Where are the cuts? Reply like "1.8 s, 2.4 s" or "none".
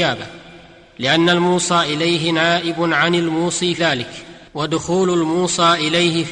3.8 s, 4.5 s